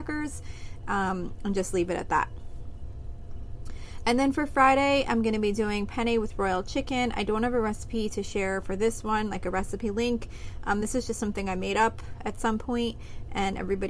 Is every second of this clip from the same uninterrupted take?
yes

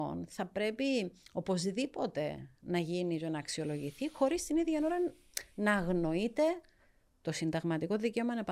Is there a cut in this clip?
no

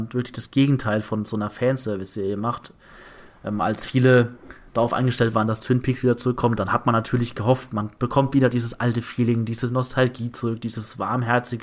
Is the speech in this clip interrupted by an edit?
no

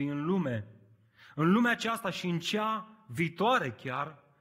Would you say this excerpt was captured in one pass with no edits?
yes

